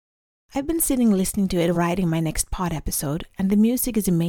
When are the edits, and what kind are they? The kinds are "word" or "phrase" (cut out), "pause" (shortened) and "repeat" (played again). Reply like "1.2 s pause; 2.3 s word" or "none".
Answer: 1.7 s word